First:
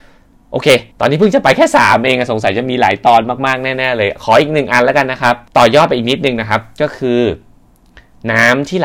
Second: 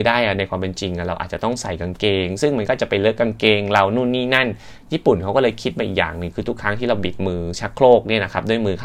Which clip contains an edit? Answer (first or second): first